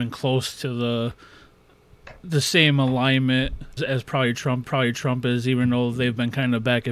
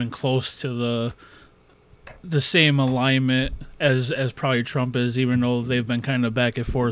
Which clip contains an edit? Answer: first; 2 cuts; at 3.8 s, 4.6 s

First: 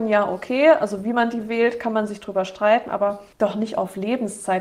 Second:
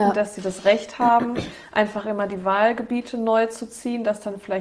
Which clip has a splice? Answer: first; 1 cut; at 3.3 s

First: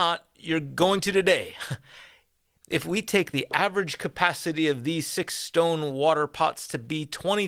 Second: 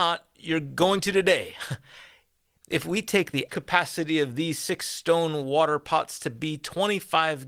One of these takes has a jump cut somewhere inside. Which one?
second; 1 cut; at 3.5 s

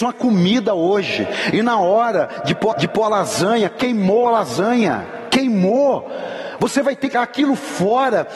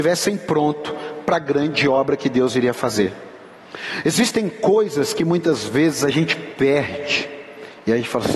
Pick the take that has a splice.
first; 2 cuts; at 2.7 s, 7.1 s

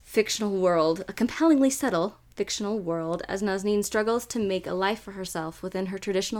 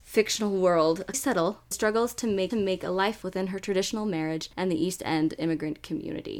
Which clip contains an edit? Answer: second; 5 cuts; at 1.1 s, 1.7 s, 2.5 s, 3.2 s, 4.5 s

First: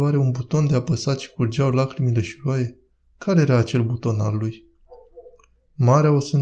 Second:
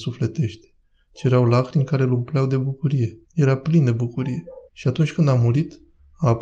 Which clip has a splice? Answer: second; 2 cuts; at 3.2 s, 4.7 s

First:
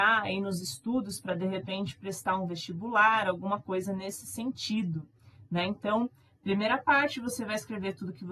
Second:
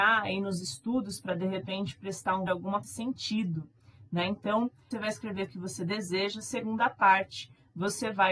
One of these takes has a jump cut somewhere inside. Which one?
second; 4 cuts; at 2.5 s, 2.8 s, 4.9 s, 5.5 s

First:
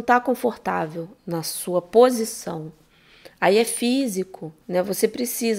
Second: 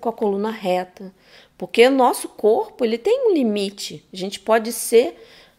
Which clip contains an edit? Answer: first; 1 cut; at 4.6 s

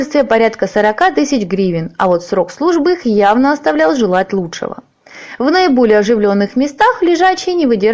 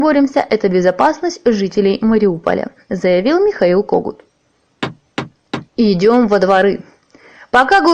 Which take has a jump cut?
second; 1 cut; at 5.7 s

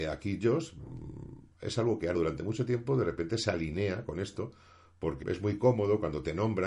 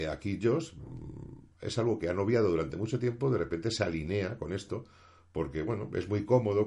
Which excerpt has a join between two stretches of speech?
first; 2 cuts; at 2.1 s, 5.2 s

